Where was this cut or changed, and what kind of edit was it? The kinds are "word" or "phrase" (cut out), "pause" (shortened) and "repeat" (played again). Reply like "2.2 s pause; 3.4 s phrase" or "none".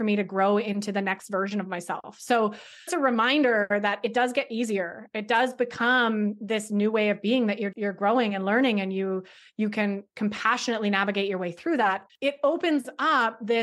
2.9 s word; 7.7 s word; 10.1 s word; 12.1 s word

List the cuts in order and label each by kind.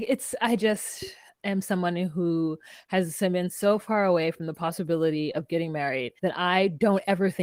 6.2 s pause

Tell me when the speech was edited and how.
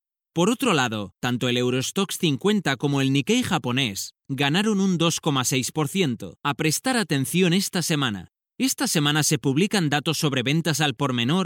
6.4 s pause

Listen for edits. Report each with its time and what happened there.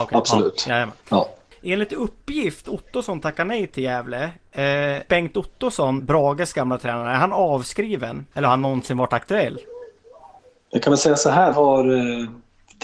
1.0 s pause; 2.6 s phrase; 5.1 s word; 6.0 s word; 8.3 s pause; 11.5 s word

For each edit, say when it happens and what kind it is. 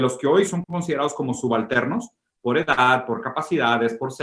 none

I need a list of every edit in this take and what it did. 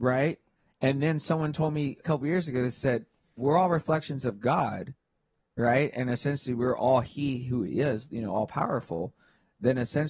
2.0 s word; 3.4 s word

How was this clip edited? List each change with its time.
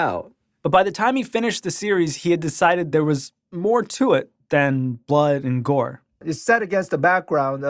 none

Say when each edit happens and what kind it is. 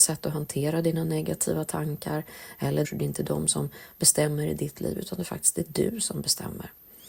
2.8 s phrase

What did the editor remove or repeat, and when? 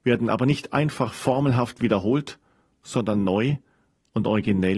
none

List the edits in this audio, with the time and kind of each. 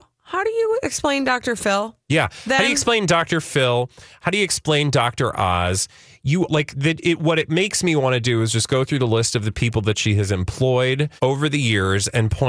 2.0 s pause; 6.5 s word; 11.2 s pause

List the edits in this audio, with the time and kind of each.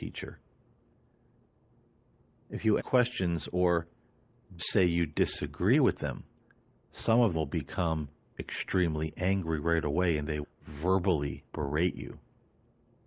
2.8 s phrase; 4.6 s word; 6.4 s pause; 7.3 s word; 10.4 s word; 11.5 s pause

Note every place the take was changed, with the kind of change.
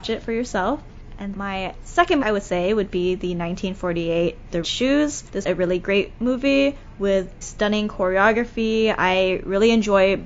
1.3 s word; 2.2 s word; 4.6 s word; 5.4 s word; 7.4 s word

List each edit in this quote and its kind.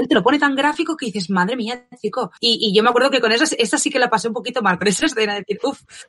2.4 s pause

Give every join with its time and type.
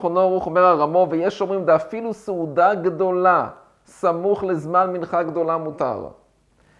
none

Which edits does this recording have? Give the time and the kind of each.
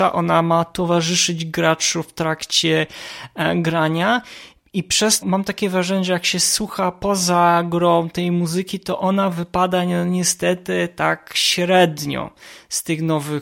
5.2 s word

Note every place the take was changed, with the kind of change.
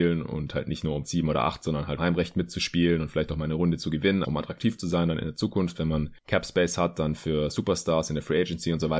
1.0 s word; 2.0 s word; 4.2 s word

